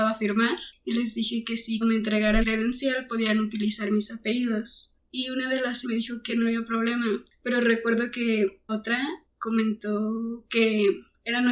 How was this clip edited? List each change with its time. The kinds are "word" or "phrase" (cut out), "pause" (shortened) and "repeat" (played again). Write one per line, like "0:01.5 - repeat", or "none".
0:01.8 - word
0:02.4 - word
0:05.8 - word
0:06.3 - phrase
0:08.7 - word

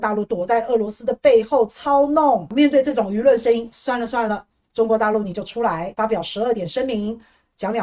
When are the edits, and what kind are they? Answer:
none

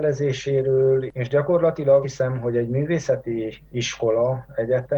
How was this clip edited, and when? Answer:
0:02.0 - word
0:03.6 - pause

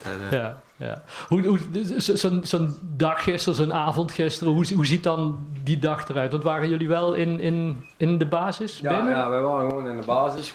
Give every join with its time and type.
0:07.9 - pause

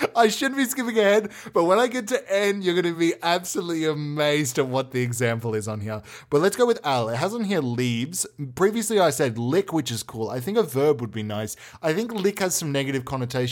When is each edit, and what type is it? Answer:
none

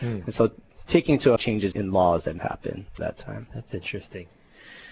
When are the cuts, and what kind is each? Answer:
0:01.4 - word
0:01.7 - word
0:02.4 - word
0:03.0 - word

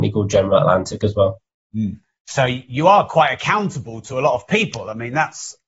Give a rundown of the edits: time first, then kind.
none

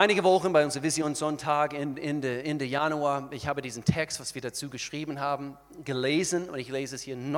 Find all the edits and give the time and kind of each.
none

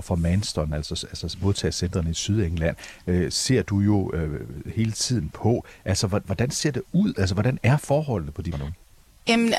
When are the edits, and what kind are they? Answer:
0:08.5 - word

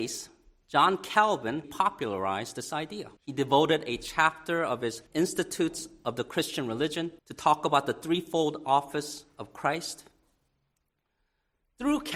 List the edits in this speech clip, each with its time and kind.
0:01.6 - word
0:03.2 - pause
0:05.1 - pause
0:07.2 - pause

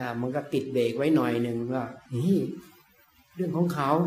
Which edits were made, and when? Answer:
0:02.1 - pause

